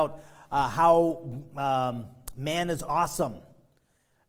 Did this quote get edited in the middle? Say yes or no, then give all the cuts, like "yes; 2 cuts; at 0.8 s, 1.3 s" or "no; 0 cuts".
no; 0 cuts